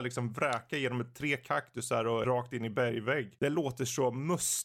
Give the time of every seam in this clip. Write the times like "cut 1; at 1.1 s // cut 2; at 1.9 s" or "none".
cut 1; at 2.2 s